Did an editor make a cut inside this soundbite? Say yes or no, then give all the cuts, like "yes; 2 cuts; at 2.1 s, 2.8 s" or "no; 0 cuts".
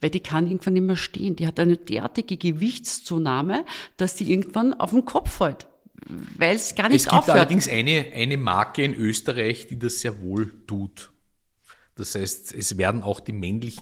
no; 0 cuts